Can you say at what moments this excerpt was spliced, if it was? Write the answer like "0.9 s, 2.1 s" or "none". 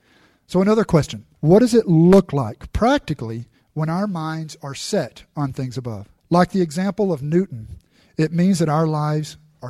1.3 s, 6.2 s